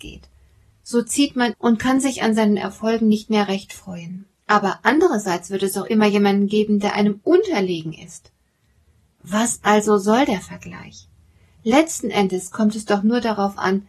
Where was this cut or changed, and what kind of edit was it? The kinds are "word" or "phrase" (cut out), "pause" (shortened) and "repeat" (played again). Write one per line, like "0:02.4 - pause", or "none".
0:01.5 - phrase
0:04.3 - pause